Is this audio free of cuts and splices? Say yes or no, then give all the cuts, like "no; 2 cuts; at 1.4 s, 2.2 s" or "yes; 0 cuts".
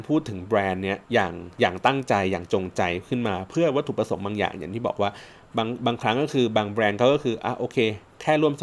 no; 1 cut; at 1.0 s